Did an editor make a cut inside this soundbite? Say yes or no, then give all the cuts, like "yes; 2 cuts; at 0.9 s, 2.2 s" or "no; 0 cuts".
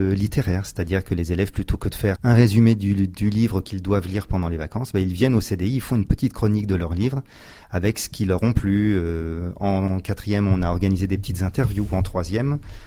yes; 1 cut; at 2.2 s